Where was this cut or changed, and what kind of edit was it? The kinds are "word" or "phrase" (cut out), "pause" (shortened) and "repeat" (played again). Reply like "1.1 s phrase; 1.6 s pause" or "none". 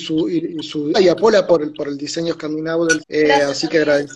0.9 s word; 1.5 s word; 3.0 s word